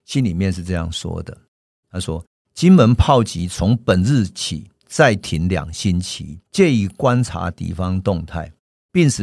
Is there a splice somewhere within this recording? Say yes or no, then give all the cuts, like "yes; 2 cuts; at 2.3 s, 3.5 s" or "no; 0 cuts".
yes; 1 cut; at 6.5 s